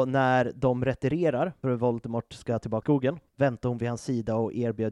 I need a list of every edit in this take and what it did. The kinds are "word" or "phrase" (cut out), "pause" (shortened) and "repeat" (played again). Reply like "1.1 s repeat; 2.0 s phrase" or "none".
1.6 s word; 2.8 s word; 3.3 s pause